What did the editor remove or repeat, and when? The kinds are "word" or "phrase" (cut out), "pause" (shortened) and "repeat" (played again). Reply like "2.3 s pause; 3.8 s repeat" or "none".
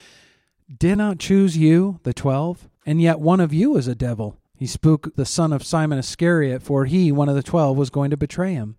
1.0 s word; 2.7 s pause; 4.5 s pause; 5.1 s phrase